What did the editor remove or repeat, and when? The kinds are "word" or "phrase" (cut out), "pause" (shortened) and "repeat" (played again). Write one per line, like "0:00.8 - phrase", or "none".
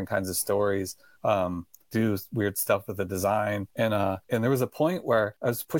none